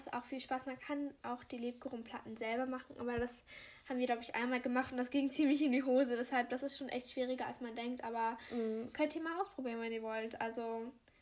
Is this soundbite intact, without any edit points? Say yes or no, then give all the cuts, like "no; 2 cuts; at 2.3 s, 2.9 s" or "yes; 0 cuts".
yes; 0 cuts